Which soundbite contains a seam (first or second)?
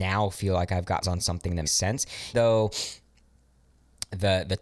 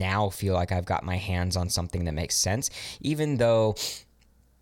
first